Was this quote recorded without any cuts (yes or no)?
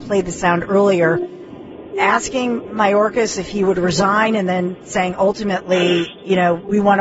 yes